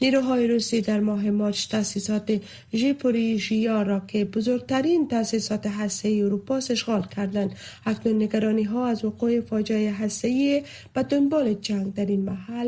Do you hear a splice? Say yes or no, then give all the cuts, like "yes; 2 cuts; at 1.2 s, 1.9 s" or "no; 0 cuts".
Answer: no; 0 cuts